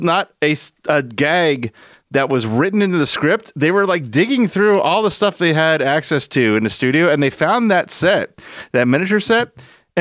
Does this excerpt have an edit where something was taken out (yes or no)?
no